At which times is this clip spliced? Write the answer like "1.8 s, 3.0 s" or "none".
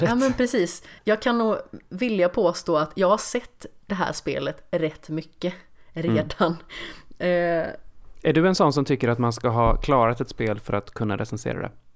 1.0 s